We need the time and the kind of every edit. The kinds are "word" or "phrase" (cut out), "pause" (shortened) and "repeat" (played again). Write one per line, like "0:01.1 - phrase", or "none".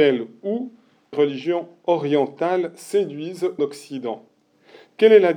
0:01.1 - word
0:03.6 - phrase

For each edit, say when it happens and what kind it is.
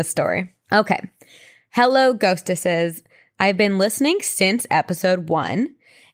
none

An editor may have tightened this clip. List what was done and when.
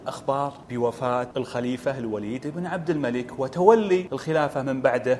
none

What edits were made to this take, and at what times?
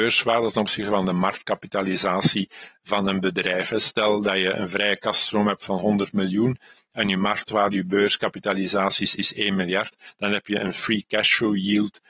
0:09.2 - repeat

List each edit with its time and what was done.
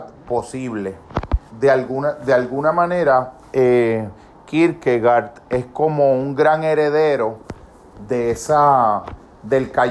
0:01.5 - pause

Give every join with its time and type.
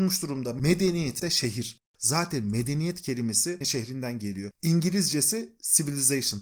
0:01.2 - word
0:01.9 - pause
0:03.6 - phrase

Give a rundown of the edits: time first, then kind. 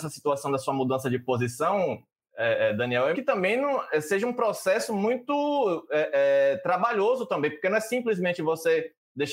0:03.1 - word

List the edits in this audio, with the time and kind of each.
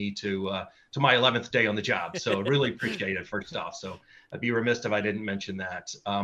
none

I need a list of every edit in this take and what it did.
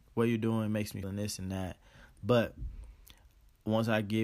0:01.0 - word

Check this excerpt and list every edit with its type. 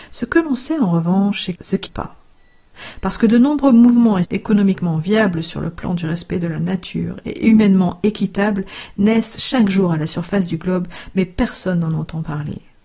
0:01.6 - word
0:01.9 - phrase
0:04.2 - phrase

